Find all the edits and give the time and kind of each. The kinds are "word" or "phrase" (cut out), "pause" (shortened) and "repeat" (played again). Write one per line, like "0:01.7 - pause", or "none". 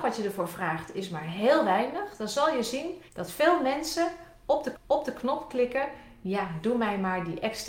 0:03.1 - pause
0:04.7 - repeat